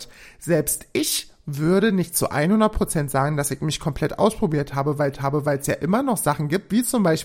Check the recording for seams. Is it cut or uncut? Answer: cut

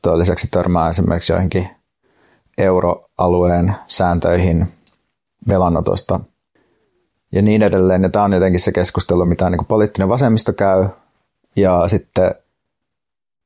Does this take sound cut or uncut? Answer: uncut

